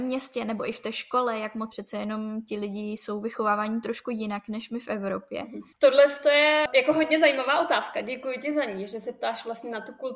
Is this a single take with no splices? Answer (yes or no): no